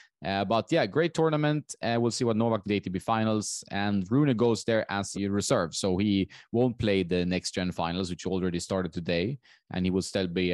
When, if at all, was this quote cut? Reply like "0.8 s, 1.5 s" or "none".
2.6 s, 5.1 s